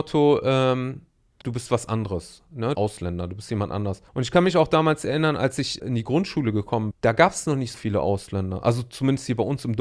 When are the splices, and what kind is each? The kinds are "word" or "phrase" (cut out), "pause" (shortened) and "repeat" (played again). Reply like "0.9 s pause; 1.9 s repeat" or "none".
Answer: 1.4 s word; 2.7 s phrase; 4.1 s pause; 5.8 s word; 6.9 s word; 7.7 s word